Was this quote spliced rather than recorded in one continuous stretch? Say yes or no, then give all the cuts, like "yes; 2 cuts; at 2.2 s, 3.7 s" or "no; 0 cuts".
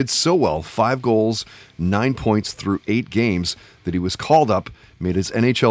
no; 0 cuts